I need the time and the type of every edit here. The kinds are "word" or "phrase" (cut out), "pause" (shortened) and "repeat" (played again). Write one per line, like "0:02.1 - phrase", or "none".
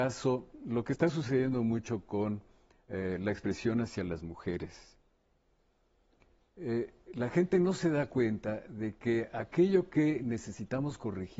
none